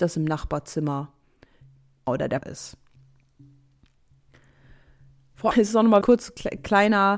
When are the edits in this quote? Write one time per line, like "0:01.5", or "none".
0:02.1
0:02.4
0:05.5
0:06.0